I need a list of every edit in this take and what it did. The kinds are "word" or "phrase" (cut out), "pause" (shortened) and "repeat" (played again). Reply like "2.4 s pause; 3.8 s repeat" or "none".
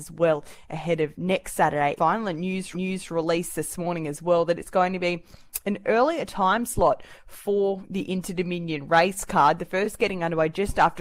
2.0 s phrase; 2.7 s repeat